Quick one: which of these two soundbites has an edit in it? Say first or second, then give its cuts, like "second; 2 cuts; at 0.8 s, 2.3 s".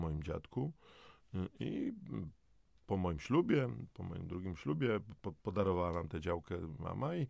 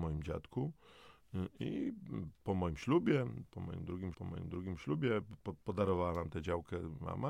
second; 2 cuts; at 2.3 s, 4.1 s